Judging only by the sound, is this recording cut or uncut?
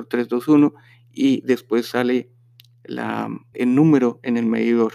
cut